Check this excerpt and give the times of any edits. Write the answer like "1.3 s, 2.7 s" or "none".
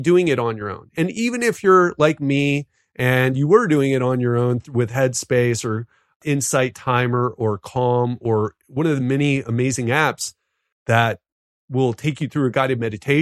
none